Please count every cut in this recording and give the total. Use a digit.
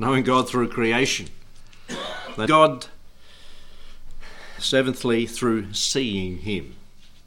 2